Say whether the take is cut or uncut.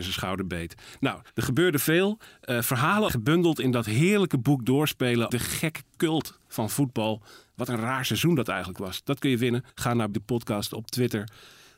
cut